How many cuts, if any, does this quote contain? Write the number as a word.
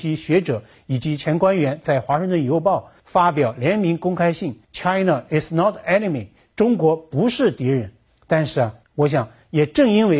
three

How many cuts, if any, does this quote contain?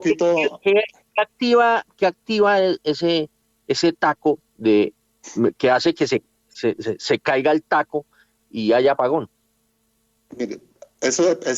one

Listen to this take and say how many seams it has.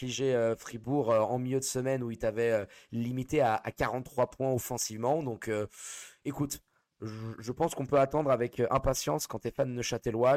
zero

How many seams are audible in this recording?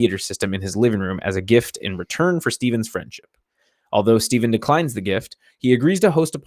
zero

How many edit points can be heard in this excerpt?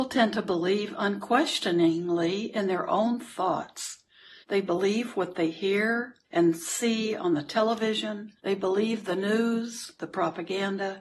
three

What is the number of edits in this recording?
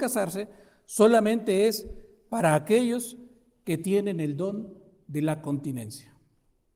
zero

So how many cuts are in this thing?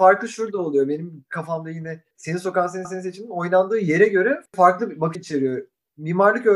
four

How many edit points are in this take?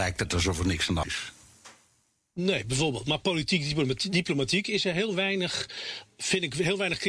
one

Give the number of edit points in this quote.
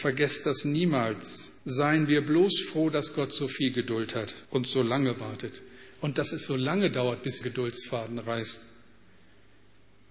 three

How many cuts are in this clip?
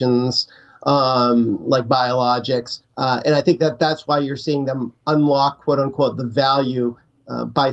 one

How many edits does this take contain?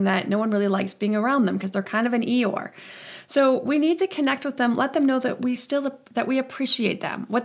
zero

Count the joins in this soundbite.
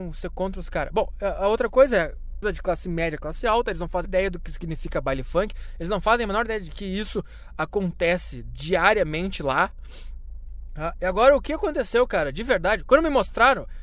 two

